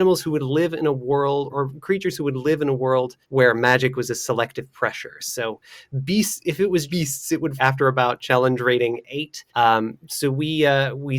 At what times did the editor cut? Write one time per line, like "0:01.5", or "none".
0:01.5
0:03.2
0:06.9
0:07.6
0:09.5